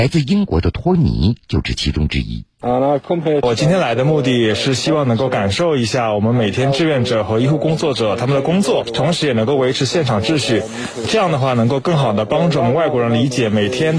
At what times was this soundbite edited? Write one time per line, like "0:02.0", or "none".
0:02.5